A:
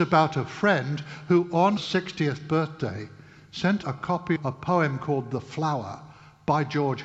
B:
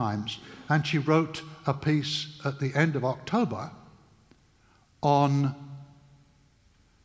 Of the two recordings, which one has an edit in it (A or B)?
A